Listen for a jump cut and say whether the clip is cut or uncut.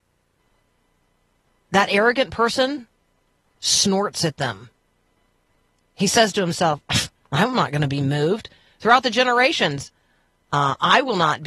uncut